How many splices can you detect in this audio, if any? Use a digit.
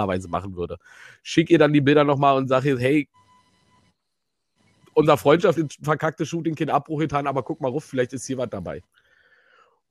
1